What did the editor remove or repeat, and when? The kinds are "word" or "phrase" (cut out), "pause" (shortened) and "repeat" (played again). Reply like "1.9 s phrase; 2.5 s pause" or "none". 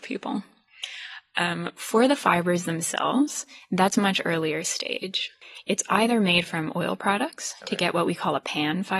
none